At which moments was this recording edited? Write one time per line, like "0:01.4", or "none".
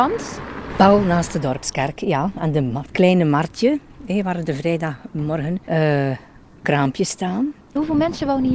0:05.6